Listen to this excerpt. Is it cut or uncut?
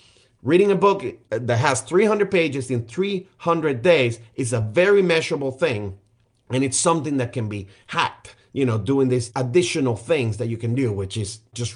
uncut